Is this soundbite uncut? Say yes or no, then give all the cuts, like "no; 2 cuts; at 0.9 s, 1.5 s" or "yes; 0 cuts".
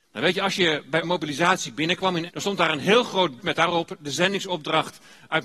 no; 3 cuts; at 1.0 s, 2.3 s, 3.4 s